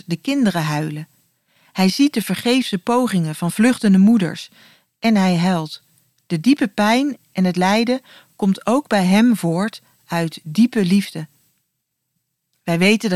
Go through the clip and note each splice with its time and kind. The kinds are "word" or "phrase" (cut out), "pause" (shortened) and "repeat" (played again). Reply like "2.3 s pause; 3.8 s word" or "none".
none